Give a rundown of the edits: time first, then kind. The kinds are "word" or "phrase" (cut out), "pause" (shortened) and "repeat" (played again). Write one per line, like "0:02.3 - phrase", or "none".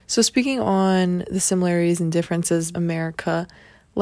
0:02.7 - word

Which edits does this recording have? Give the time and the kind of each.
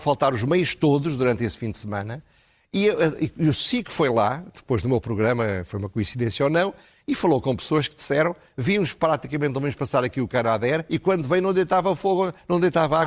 none

